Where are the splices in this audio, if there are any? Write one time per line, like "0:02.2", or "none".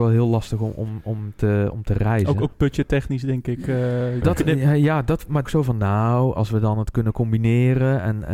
0:04.2
0:05.4